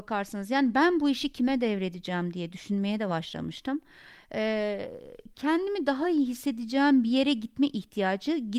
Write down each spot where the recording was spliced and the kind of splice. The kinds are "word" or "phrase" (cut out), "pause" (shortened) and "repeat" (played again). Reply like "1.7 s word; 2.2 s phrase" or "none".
none